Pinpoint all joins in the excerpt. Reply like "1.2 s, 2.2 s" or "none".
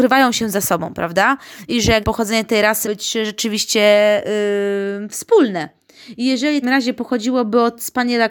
2.0 s, 2.8 s, 6.6 s

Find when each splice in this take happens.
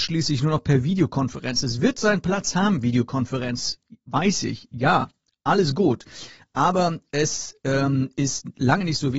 none

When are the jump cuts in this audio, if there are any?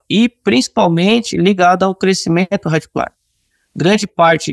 none

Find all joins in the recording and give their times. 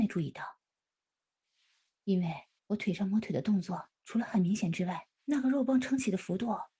2.6 s, 3.9 s, 5.1 s

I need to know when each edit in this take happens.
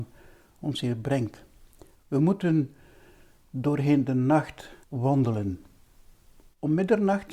4.8 s

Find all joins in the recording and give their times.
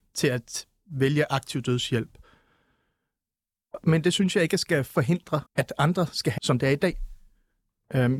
5.5 s, 6.4 s

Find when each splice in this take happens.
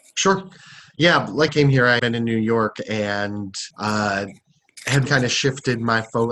1.5 s, 2.0 s, 3.7 s, 5.1 s

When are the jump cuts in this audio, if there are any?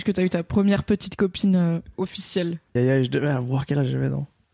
2.8 s

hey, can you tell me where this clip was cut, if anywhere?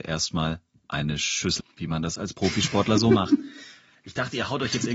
1.6 s

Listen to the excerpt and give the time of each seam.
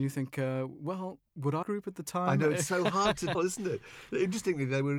1.3 s, 1.6 s, 3.3 s

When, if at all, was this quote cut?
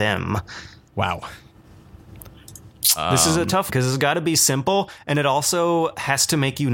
3.7 s

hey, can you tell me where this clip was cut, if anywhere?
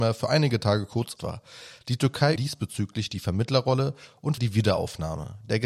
1.2 s, 2.4 s, 4.4 s

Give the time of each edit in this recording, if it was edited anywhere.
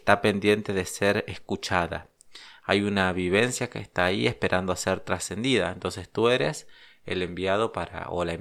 none

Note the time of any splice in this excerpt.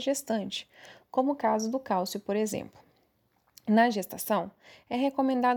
none

